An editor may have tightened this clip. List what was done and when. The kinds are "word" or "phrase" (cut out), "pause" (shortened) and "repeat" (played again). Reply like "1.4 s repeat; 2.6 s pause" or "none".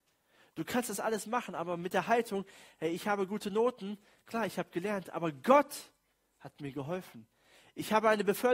none